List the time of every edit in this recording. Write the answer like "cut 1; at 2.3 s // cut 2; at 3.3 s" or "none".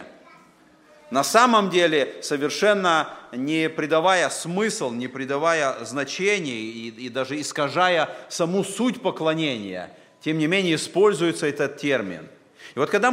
none